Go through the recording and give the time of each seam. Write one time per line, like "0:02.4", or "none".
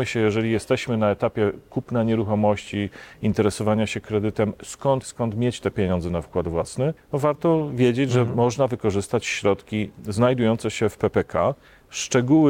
0:05.0
0:07.0